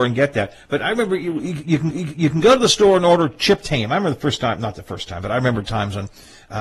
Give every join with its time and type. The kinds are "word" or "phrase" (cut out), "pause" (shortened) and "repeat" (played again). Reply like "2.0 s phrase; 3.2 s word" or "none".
1.9 s repeat

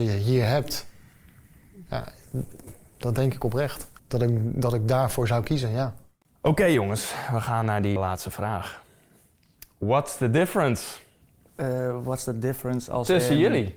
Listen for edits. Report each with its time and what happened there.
4.0 s pause; 8.0 s word

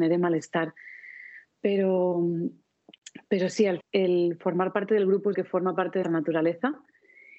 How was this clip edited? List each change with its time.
3.8 s word; 5.3 s word; 6.0 s word

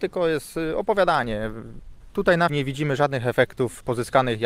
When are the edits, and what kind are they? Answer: 2.5 s word

